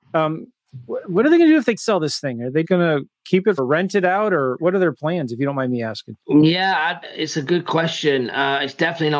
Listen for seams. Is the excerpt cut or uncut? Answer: cut